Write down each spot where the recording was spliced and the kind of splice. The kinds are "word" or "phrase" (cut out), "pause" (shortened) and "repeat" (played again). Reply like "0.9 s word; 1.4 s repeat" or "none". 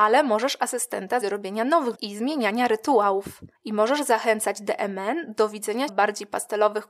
1.2 s word; 1.9 s word; 3.6 s pause; 5.9 s word